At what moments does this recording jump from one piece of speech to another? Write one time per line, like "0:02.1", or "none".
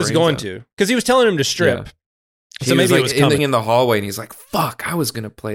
0:03.4